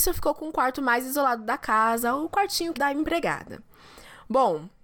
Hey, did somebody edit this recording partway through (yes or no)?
yes